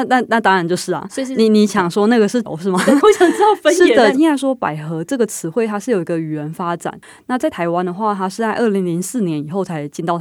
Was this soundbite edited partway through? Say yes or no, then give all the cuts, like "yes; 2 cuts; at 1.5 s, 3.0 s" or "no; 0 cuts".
yes; 3 cuts; at 2.4 s, 3.0 s, 4.1 s